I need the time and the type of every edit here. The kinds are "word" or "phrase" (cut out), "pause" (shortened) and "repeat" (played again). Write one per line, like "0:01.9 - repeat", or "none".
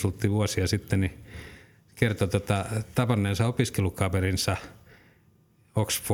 none